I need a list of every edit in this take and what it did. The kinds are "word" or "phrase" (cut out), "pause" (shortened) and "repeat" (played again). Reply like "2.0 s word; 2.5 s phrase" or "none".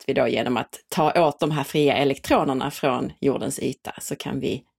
1.4 s word